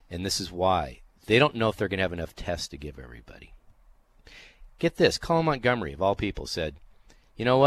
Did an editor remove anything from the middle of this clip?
no; 0 cuts

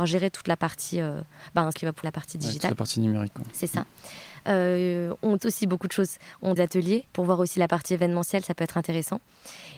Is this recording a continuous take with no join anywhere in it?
no; 6 cuts; at 1.7 s, 2.0 s, 5.4 s, 6.6 s, 7.1 s, 7.5 s

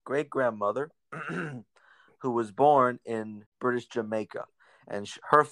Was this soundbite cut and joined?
no; 0 cuts

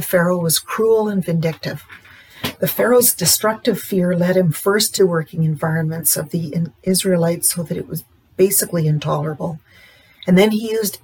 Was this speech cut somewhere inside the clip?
yes; 1 cut; at 5.0 s

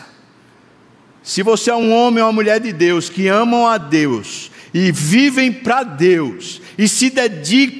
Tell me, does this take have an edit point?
no; 0 cuts

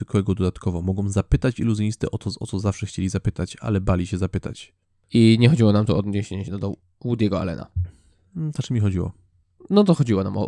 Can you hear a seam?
no; 0 cuts

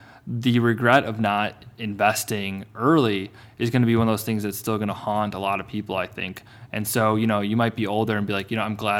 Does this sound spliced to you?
no; 0 cuts

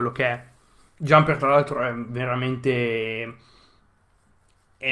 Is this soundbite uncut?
yes; 0 cuts

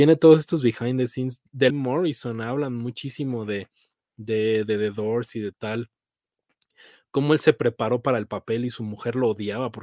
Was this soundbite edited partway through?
yes; 1 cut; at 1.7 s

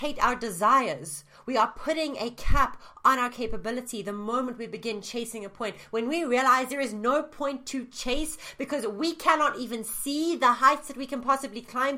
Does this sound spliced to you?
no; 0 cuts

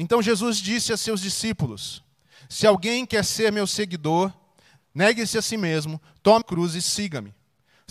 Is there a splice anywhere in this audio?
yes; 1 cut; at 6.4 s

